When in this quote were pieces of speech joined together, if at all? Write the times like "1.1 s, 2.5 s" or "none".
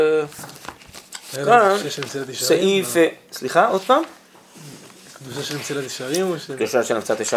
none